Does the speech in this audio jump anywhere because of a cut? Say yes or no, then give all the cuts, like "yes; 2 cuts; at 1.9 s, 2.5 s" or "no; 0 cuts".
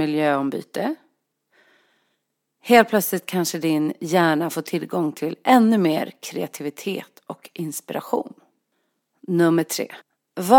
no; 0 cuts